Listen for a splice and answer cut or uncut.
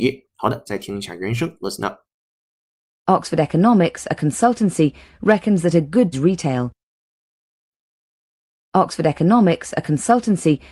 cut